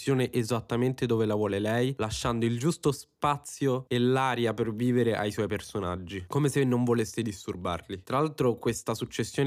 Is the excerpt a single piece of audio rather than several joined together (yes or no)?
yes